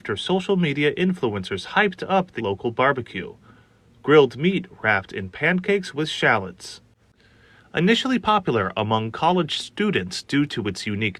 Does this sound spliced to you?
yes; 1 cut; at 2.4 s

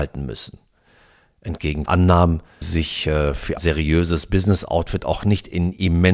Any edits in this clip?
yes; 3 cuts; at 1.9 s, 2.6 s, 3.6 s

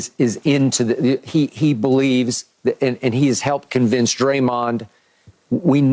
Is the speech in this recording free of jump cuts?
yes; 0 cuts

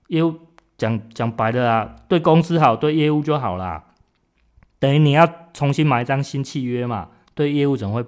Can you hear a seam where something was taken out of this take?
no; 0 cuts

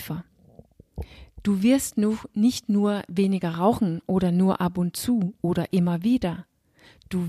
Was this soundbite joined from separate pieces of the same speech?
no; 0 cuts

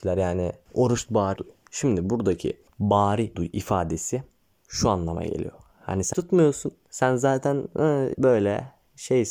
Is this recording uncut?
no; 5 cuts; at 1.1 s, 1.4 s, 3.3 s, 6.1 s, 8.1 s

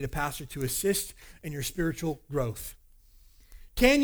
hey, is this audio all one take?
yes; 0 cuts

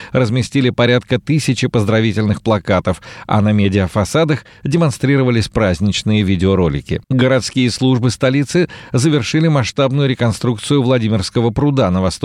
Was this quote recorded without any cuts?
no; 1 cut; at 7.0 s

